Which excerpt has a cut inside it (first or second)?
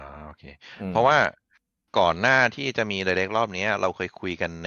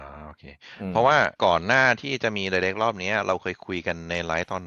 second